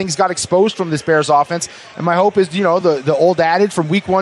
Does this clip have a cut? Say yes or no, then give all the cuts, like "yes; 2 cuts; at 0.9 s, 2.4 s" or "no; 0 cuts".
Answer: no; 0 cuts